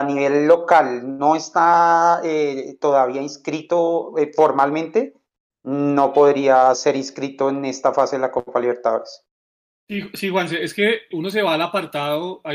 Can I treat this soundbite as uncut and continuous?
no; 1 cut; at 11.1 s

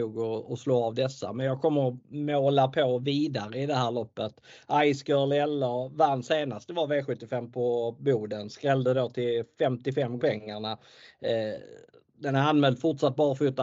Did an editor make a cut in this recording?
yes; 1 cut; at 10.2 s

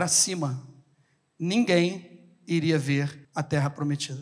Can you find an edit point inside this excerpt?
yes; 1 cut; at 3.2 s

